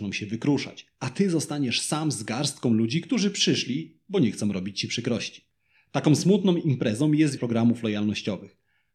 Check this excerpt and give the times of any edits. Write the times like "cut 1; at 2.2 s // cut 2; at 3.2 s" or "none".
cut 1; at 7.4 s